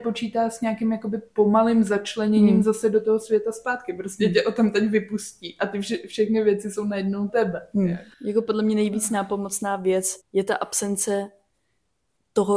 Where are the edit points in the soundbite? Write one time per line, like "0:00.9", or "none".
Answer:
0:07.3
0:08.1
0:10.2